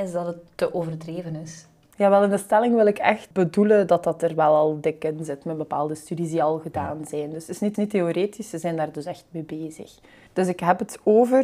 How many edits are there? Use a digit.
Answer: 1